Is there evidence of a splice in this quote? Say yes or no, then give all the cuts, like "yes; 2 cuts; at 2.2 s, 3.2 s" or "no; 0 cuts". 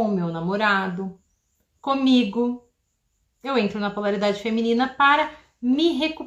no; 0 cuts